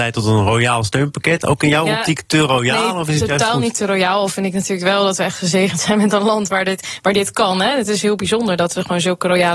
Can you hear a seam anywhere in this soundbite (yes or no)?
no